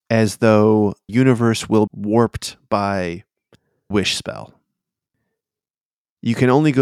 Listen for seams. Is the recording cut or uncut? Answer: cut